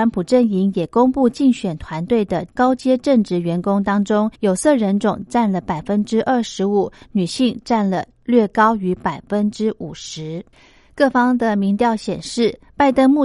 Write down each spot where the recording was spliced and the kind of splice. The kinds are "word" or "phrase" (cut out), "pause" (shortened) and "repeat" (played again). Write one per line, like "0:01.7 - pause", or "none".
0:04.3 - pause